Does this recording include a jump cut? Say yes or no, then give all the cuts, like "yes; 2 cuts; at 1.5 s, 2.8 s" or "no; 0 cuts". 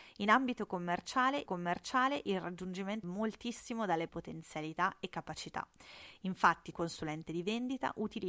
yes; 4 cuts; at 1.5 s, 3.0 s, 4.1 s, 6.7 s